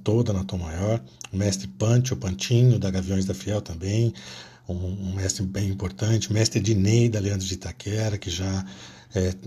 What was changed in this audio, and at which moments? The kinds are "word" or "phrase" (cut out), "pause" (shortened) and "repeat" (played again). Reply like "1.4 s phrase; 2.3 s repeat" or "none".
none